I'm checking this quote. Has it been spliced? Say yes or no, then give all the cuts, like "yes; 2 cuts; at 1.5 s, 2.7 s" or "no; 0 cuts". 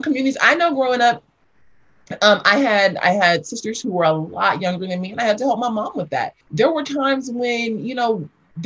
yes; 1 cut; at 6.4 s